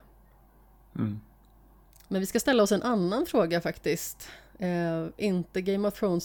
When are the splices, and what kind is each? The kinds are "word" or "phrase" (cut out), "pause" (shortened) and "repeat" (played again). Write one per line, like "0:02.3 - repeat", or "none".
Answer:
0:01.9 - pause